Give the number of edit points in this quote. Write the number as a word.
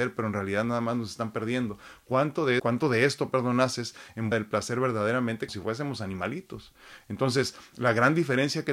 three